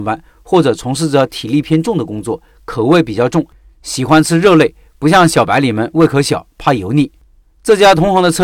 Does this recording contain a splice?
no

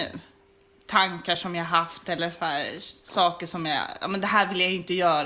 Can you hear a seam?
no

